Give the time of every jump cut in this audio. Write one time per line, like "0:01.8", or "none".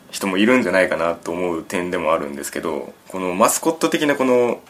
0:03.0